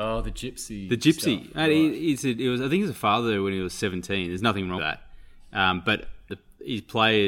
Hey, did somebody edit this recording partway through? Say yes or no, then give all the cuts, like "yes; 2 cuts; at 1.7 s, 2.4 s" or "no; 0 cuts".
yes; 2 cuts; at 4.8 s, 6.3 s